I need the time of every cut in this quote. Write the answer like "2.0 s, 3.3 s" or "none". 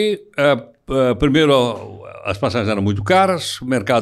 none